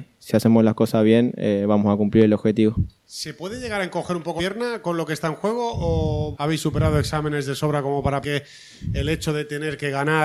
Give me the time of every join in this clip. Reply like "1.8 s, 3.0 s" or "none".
3.0 s, 4.4 s, 6.3 s, 8.2 s